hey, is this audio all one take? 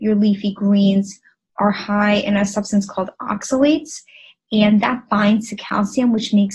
yes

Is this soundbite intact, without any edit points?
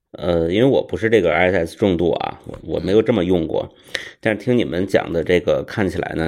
yes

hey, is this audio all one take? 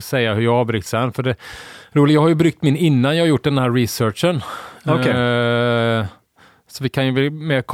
yes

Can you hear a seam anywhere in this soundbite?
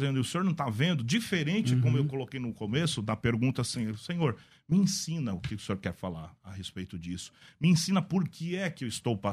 no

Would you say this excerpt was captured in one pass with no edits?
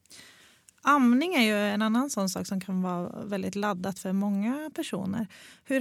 yes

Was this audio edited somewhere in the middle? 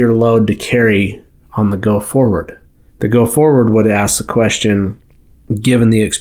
no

